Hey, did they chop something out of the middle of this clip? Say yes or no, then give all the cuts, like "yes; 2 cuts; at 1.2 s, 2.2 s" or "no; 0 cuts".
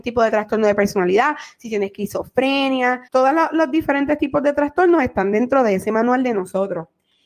yes; 1 cut; at 3.1 s